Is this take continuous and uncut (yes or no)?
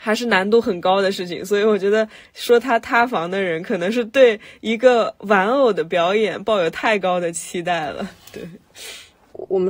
yes